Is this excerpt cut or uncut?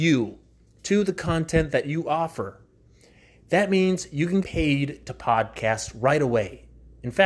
cut